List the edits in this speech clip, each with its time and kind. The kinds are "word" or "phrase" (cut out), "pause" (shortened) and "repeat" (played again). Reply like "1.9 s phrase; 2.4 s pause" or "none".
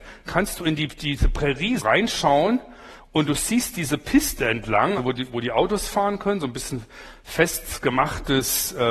1.8 s word; 5.0 s word